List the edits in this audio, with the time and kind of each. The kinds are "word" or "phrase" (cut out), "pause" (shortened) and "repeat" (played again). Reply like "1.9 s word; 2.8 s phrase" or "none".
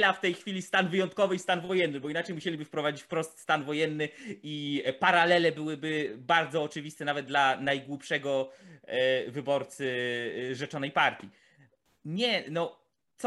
none